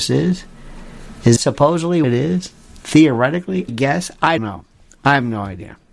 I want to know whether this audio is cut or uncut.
cut